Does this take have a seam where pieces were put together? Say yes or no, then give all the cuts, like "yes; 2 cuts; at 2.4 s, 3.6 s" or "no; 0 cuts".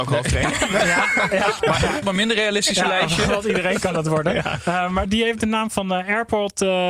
yes; 2 cuts; at 2.0 s, 5.0 s